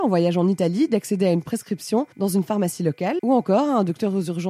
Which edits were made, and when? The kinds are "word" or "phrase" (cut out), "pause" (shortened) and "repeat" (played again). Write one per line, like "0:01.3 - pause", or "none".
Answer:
0:02.1 - pause